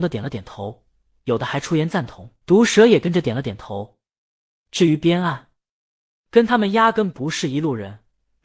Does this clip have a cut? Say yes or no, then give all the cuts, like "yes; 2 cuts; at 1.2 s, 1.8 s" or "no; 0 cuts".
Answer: yes; 1 cut; at 2.4 s